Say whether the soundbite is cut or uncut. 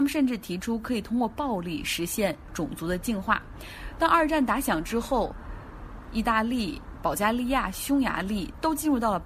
cut